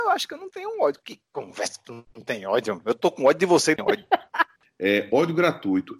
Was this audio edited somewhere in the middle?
yes; 1 cut; at 3.8 s

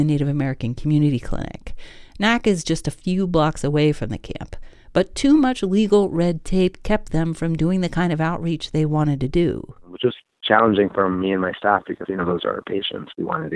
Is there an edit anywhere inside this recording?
no; 0 cuts

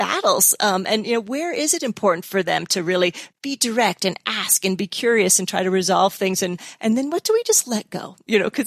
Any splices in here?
no; 0 cuts

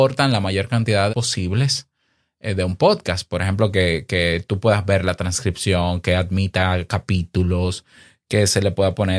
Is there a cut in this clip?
yes; 1 cut; at 1.1 s

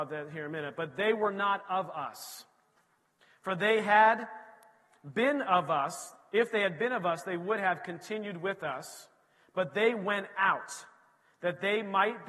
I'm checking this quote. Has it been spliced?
no; 0 cuts

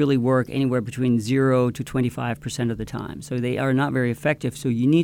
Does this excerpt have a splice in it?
no; 0 cuts

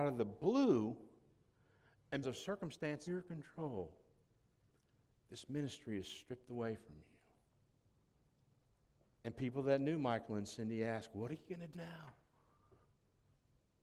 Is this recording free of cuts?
no; 3 cuts; at 2.2 s, 3.1 s, 11.7 s

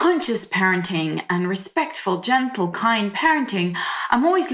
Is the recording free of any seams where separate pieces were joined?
yes; 0 cuts

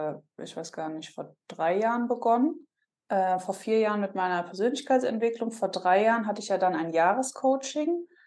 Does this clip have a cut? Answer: no; 0 cuts

